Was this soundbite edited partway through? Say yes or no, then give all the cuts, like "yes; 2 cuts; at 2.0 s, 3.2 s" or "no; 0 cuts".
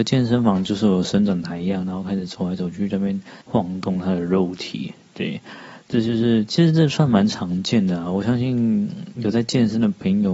yes; 1 cut; at 3.4 s